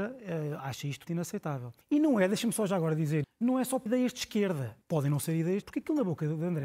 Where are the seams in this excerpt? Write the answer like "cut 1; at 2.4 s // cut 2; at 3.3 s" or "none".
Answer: cut 1; at 1.1 s // cut 2; at 1.8 s // cut 3; at 3.2 s // cut 4; at 3.9 s // cut 5; at 4.8 s // cut 6; at 5.6 s